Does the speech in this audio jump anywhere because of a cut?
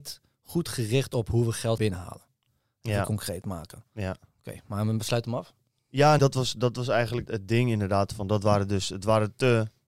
yes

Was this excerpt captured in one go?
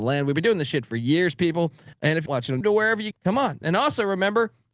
no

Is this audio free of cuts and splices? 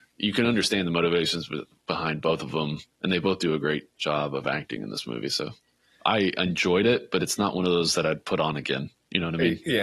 no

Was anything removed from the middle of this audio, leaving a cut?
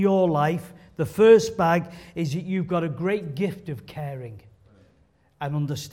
no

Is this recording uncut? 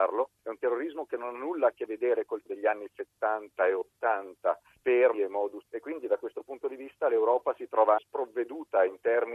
no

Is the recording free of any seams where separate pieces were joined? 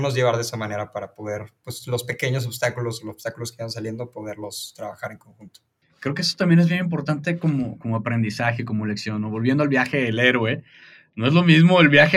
yes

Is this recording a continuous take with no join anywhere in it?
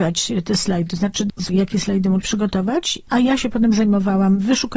no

